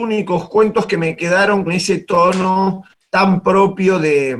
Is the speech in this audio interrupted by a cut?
yes; 2 cuts; at 1.7 s, 2.9 s

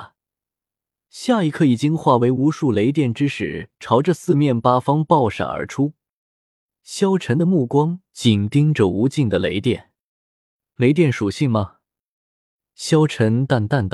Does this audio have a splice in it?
no; 0 cuts

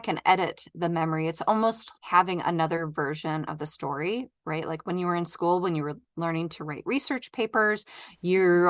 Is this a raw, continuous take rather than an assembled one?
no; 1 cut; at 2.0 s

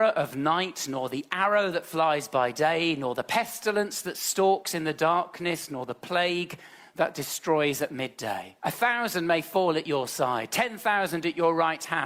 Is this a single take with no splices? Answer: no; 1 cut; at 8.6 s

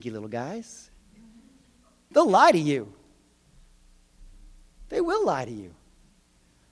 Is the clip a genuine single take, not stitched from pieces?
yes; 0 cuts

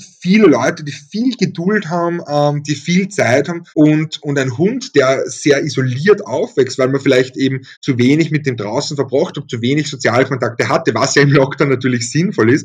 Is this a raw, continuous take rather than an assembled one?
no; 2 cuts; at 3.7 s, 7.7 s

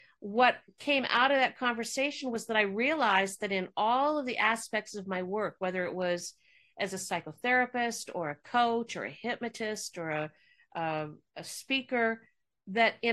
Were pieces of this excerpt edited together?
no; 0 cuts

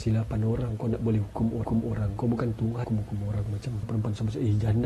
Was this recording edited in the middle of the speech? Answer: yes; 3 cuts; at 1.6 s, 2.8 s, 3.8 s

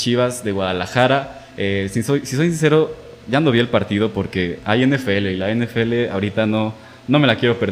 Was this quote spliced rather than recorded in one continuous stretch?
no; 0 cuts

